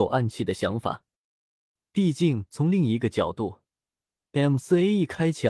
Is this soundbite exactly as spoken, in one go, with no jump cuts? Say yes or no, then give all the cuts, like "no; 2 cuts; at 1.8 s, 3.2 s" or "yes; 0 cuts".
yes; 0 cuts